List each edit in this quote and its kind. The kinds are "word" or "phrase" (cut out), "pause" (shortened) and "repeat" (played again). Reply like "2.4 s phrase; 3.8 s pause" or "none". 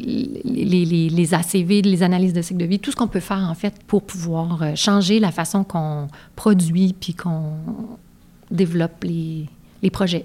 3.8 s pause